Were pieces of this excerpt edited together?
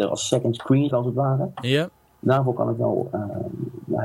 yes; 1 cut; at 0.9 s

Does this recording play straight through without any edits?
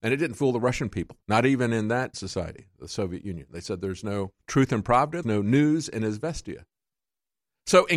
no; 4 cuts; at 1.2 s, 2.1 s, 4.4 s, 5.2 s

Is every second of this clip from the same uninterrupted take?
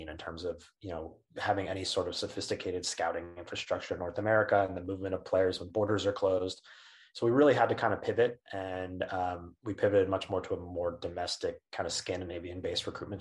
yes; 0 cuts

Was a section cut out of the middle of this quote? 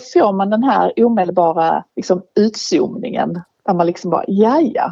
yes; 1 cut; at 1.9 s

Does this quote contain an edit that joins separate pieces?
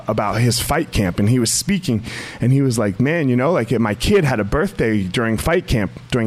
no; 0 cuts

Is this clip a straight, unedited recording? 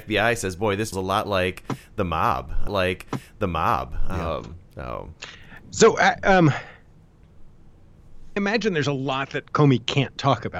no; 4 cuts; at 0.9 s, 2.7 s, 5.6 s, 8.4 s

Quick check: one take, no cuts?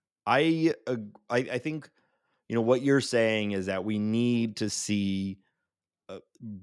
yes; 0 cuts

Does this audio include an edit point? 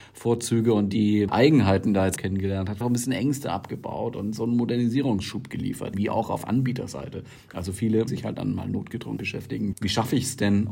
yes; 7 cuts; at 1.3 s, 2.2 s, 2.8 s, 5.9 s, 8.1 s, 9.2 s, 9.7 s

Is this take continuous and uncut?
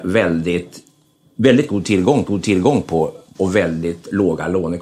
no; 2 cuts; at 2.3 s, 3.4 s

